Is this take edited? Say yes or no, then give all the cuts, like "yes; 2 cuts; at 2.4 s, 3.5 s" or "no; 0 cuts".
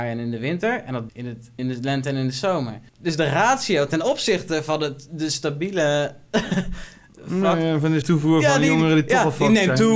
yes; 4 cuts; at 1.1 s, 1.6 s, 2.9 s, 8.0 s